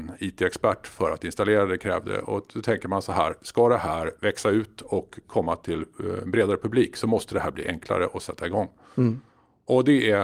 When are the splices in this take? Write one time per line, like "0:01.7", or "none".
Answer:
none